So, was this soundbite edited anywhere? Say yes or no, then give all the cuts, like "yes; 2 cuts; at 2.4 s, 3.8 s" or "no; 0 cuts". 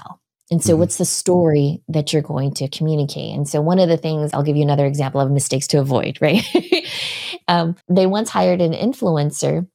yes; 2 cuts; at 4.3 s, 7.8 s